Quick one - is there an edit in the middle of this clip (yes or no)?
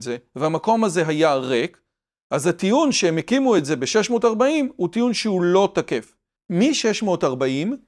no